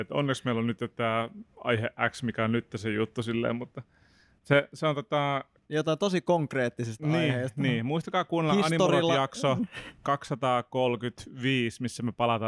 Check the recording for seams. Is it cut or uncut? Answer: cut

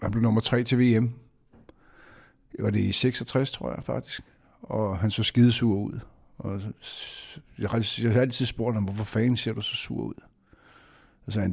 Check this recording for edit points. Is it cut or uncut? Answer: uncut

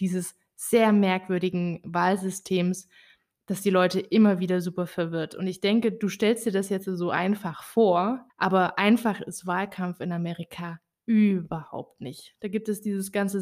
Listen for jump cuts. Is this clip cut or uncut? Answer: uncut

